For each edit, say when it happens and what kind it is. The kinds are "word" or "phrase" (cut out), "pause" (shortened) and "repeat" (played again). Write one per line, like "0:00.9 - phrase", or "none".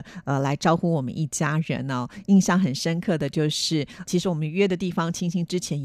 0:04.1 - word